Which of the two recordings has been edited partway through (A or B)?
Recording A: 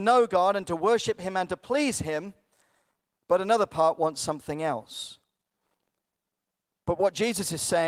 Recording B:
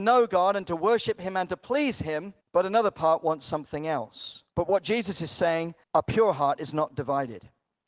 B